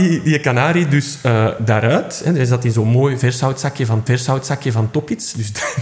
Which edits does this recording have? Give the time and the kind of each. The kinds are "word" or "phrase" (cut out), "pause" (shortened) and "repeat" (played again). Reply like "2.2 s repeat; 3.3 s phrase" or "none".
1.6 s word; 4.1 s repeat